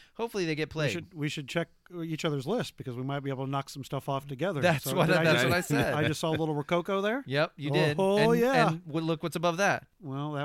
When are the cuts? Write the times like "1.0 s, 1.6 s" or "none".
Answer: none